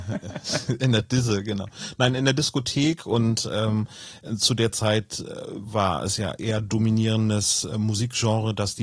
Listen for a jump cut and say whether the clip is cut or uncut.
uncut